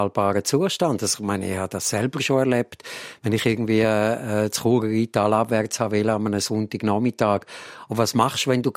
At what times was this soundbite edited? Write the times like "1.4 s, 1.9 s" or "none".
none